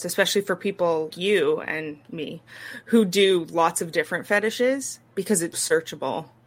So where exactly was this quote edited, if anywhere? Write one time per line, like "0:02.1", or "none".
0:01.1
0:05.5